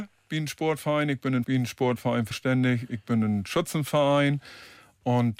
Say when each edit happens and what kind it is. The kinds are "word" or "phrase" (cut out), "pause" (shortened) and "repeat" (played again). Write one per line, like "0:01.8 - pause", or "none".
0:01.4 - word
0:02.3 - phrase